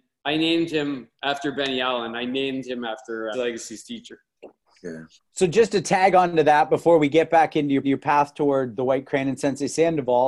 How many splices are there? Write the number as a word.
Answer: three